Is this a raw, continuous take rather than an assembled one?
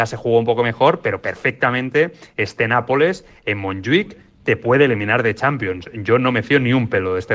yes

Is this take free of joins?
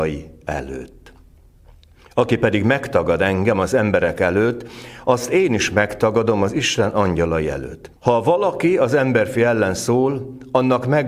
no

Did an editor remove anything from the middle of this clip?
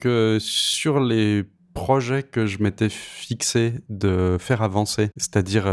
no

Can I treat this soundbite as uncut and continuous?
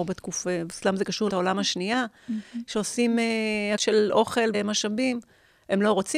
no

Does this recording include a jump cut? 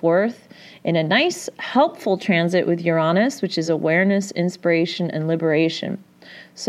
no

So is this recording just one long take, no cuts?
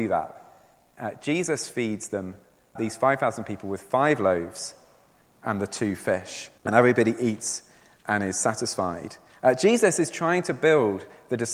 no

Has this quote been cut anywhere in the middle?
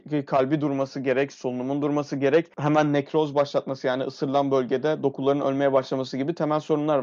no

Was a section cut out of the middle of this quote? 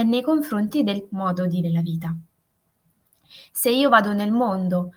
yes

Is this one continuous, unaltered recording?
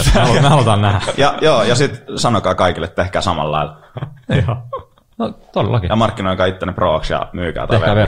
yes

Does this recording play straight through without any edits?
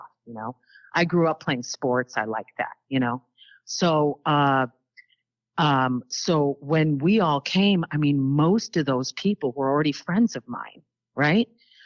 yes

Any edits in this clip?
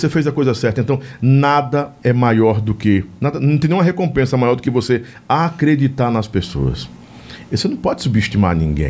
no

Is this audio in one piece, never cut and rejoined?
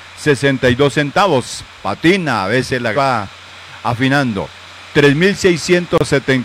no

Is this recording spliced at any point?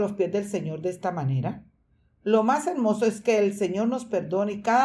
no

